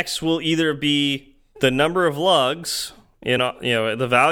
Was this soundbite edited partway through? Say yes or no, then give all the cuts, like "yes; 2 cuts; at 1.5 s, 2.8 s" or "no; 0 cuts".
no; 0 cuts